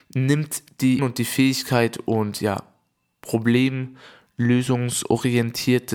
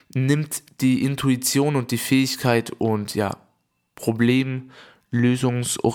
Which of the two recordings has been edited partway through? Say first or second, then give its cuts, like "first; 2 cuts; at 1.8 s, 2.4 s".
first; 1 cut; at 1.0 s